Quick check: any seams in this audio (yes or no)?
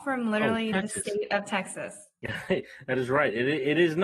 no